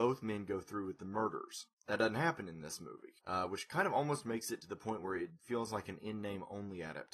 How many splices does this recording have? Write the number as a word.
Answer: one